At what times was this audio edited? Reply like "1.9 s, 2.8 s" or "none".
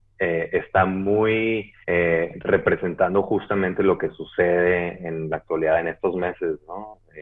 1.8 s